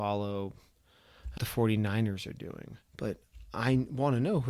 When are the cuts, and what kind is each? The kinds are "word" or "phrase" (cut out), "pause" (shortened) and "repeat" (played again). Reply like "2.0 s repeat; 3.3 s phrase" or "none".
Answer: 1.4 s phrase; 2.9 s pause